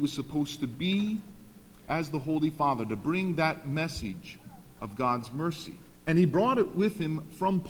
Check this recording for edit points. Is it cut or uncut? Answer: cut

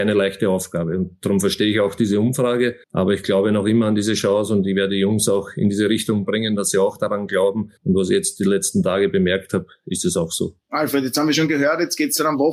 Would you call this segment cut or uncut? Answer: cut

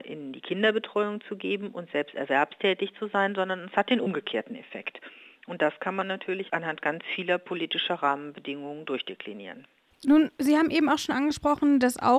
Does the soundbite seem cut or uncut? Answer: uncut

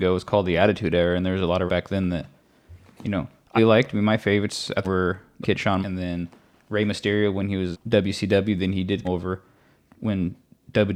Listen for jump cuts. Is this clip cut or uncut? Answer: cut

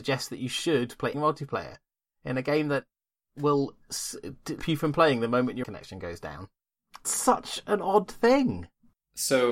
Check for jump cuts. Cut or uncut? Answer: cut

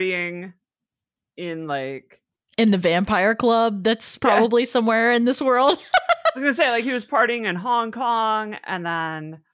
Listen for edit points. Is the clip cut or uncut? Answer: uncut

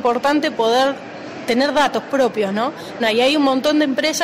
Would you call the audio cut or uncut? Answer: cut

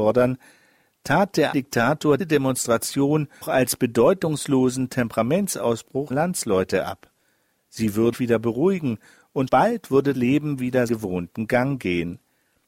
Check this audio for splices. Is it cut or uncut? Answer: cut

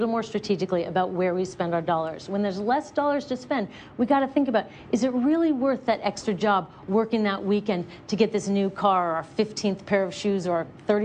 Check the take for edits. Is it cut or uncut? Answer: uncut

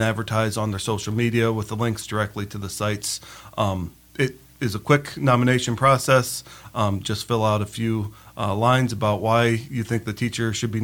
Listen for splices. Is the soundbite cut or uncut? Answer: uncut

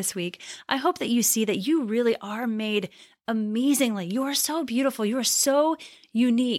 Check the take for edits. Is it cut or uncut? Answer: uncut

